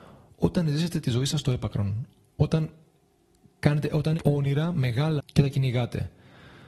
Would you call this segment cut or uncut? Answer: cut